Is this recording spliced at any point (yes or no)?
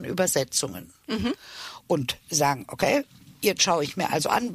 no